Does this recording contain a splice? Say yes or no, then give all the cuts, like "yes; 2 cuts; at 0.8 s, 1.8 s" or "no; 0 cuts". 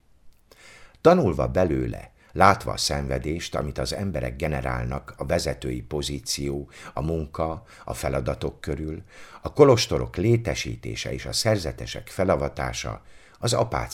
no; 0 cuts